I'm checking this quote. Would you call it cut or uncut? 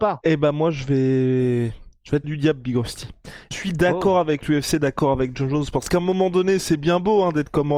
cut